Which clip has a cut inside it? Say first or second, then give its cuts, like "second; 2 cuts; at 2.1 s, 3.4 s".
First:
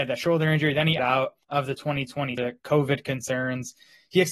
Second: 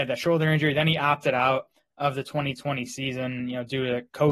first; 3 cuts; at 1.0 s, 1.4 s, 2.4 s